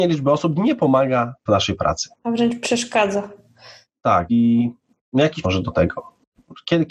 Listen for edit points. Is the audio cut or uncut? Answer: cut